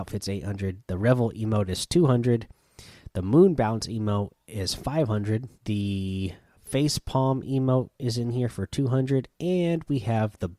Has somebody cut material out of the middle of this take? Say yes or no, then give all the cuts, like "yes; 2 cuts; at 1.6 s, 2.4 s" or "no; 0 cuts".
yes; 1 cut; at 5.5 s